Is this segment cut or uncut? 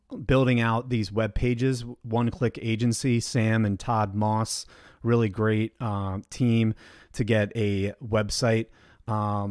uncut